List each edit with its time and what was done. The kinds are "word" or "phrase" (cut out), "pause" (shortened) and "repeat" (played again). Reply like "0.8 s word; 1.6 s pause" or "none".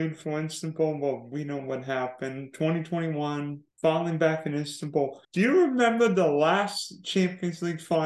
3.7 s pause; 5.2 s pause